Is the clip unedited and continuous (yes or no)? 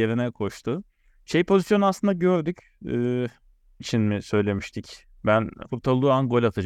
no